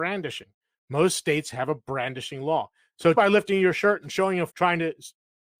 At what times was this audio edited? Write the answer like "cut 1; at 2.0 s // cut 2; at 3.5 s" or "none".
cut 1; at 3.1 s // cut 2; at 4.5 s